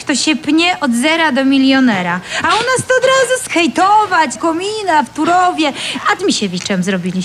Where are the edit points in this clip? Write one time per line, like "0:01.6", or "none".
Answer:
0:03.5
0:04.4
0:06.2